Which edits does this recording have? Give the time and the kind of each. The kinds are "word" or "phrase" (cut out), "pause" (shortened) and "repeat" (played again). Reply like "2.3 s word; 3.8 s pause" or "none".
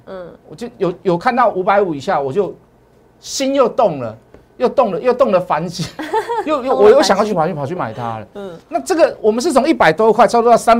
8.6 s pause